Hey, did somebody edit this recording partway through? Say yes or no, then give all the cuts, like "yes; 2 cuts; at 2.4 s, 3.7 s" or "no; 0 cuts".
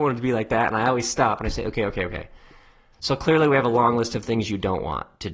no; 0 cuts